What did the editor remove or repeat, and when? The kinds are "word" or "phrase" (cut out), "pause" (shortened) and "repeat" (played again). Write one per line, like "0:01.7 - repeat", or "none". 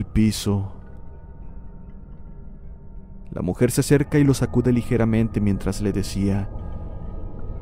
none